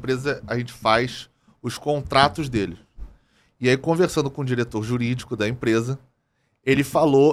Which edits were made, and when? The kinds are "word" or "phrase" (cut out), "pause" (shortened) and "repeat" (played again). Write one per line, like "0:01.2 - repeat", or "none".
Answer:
none